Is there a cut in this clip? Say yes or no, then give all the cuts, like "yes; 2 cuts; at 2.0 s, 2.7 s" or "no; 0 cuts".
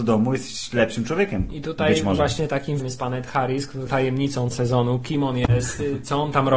yes; 3 cuts; at 2.8 s, 3.9 s, 4.5 s